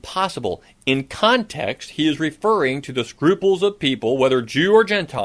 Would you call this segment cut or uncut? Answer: uncut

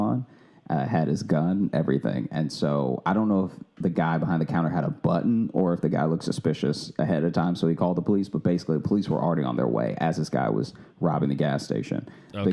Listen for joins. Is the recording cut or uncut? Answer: uncut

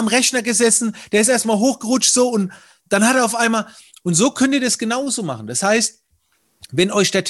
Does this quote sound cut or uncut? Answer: uncut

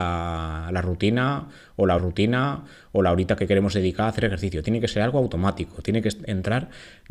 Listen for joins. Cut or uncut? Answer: cut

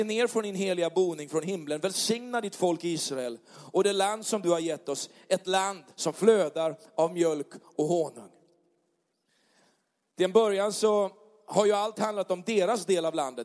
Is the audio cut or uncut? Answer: cut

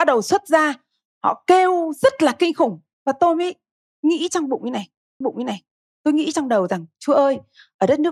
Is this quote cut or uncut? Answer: cut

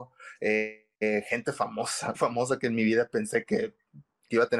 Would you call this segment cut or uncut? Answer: cut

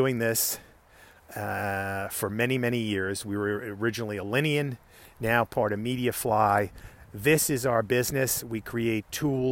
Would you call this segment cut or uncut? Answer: uncut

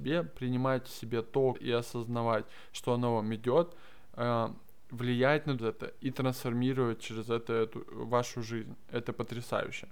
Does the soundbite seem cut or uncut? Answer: cut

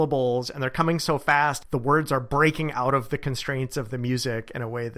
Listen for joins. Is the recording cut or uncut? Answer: uncut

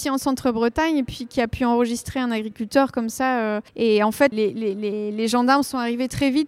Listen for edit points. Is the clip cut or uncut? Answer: cut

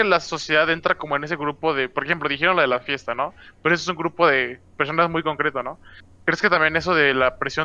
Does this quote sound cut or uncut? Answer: uncut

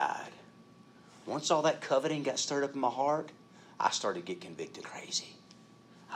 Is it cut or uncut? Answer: cut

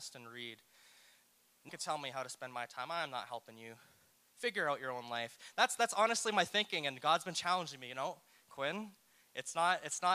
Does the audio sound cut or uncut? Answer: cut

